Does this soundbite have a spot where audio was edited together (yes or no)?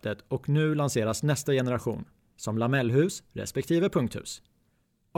no